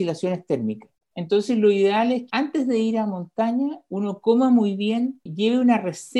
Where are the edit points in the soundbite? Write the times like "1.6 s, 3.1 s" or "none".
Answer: 2.3 s

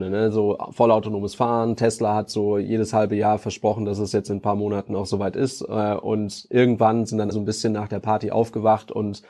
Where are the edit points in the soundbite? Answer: 7.3 s

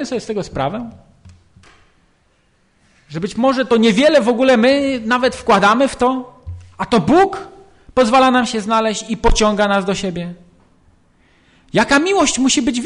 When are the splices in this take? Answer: none

